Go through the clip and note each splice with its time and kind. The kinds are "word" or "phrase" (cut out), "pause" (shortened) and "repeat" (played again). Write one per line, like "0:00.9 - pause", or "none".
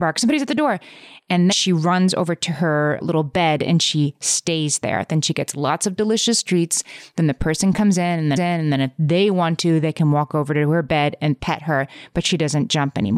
0:01.5 - word
0:03.0 - word
0:08.4 - repeat